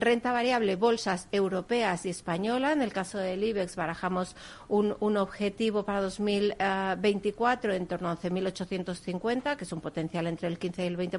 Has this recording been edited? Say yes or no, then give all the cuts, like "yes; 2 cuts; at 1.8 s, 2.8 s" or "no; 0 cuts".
no; 0 cuts